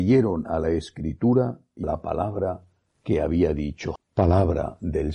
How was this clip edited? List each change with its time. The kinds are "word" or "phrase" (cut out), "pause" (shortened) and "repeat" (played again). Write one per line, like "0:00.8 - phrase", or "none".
0:01.8 - word
0:04.0 - word